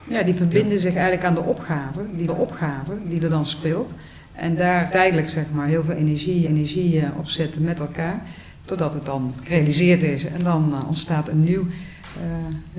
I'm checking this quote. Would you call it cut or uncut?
cut